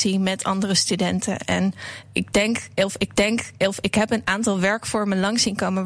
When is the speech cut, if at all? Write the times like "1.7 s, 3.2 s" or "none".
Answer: 2.0 s, 3.1 s

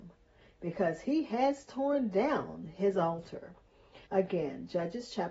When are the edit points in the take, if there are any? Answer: 4.0 s

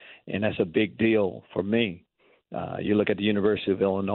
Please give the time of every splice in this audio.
none

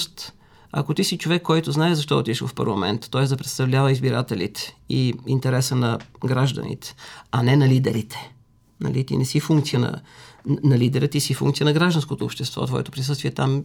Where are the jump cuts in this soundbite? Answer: none

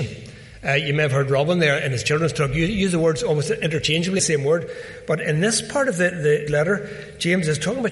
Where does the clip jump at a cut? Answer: 4.2 s, 6.5 s

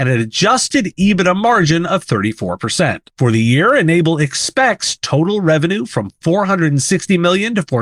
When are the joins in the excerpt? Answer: 3.1 s

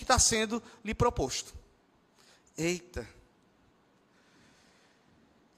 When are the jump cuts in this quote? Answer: 1.8 s

